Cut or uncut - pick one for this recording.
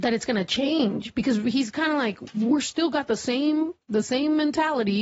uncut